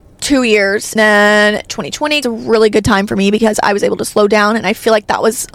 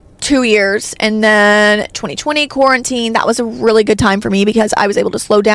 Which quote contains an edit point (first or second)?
first